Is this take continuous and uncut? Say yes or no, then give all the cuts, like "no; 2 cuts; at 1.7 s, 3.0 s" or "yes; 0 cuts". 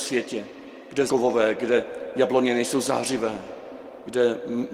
no; 1 cut; at 1.1 s